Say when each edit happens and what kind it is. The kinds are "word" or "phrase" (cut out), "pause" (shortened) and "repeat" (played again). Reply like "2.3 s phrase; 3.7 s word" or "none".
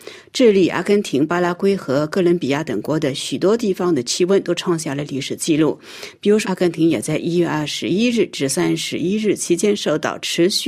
6.4 s phrase